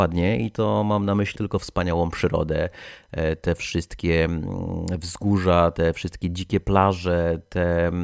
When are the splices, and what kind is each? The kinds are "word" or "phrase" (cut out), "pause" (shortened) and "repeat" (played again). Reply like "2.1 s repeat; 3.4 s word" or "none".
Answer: 1.4 s word